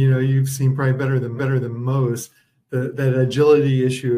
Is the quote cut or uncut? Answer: cut